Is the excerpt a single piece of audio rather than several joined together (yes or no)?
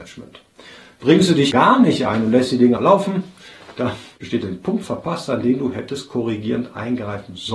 no